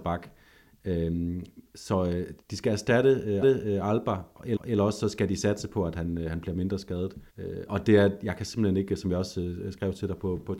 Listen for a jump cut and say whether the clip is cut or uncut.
cut